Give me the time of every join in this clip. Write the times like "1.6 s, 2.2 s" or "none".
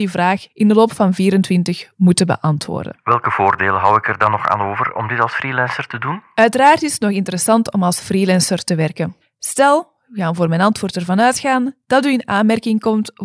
none